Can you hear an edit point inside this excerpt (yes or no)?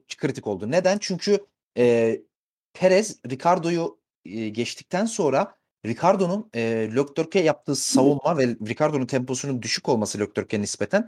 no